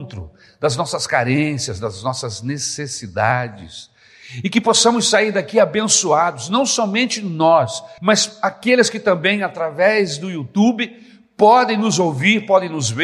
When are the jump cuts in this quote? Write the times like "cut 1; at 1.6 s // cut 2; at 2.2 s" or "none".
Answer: cut 1; at 8.0 s